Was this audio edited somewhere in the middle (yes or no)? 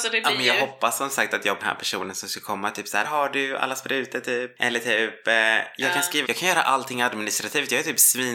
yes